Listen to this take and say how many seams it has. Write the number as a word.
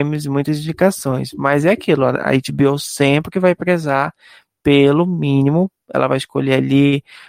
zero